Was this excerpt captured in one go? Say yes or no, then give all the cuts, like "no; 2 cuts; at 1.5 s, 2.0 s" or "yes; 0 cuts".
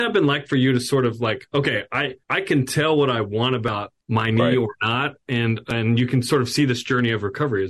no; 2 cuts; at 2.2 s, 4.0 s